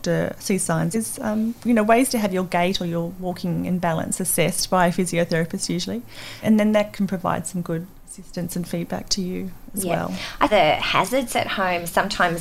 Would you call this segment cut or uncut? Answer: cut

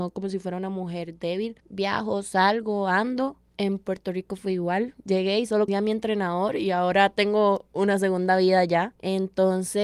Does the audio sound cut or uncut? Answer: cut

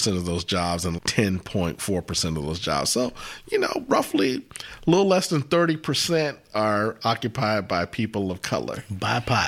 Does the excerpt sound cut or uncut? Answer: cut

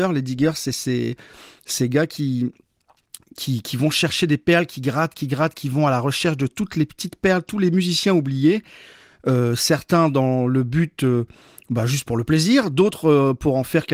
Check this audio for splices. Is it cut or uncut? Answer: uncut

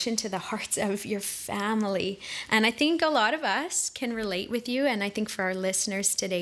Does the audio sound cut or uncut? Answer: uncut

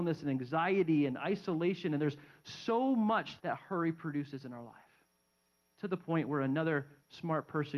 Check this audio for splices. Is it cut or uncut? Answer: cut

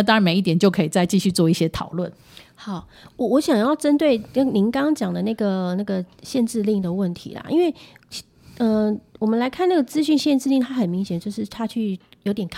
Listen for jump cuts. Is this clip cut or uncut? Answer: uncut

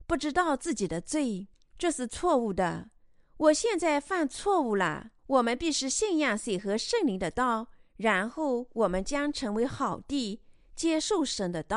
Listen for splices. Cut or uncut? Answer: cut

